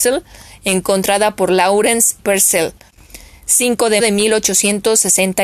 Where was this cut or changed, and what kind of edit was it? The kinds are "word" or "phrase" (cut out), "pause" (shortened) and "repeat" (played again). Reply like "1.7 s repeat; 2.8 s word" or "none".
2.2 s word; 4.0 s word